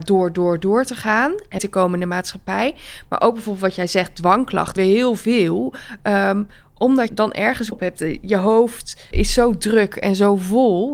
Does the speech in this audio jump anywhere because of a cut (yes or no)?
yes